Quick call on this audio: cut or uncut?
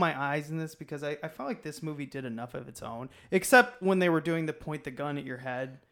uncut